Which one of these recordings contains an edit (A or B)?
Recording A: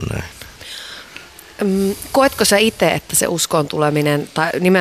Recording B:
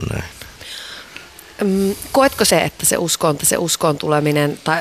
B